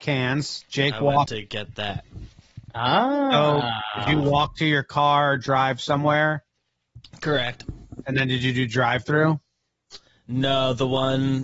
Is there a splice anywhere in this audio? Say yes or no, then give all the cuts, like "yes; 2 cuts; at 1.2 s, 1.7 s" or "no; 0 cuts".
no; 0 cuts